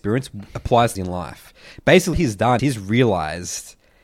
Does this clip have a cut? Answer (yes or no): yes